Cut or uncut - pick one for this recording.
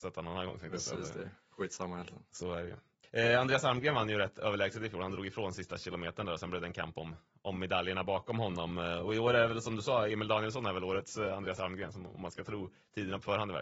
uncut